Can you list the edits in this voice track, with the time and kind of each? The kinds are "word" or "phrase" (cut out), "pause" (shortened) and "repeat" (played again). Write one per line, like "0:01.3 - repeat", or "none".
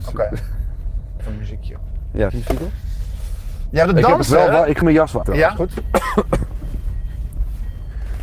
0:01.2 - word
0:02.3 - word
0:04.8 - word
0:05.2 - word
0:05.6 - word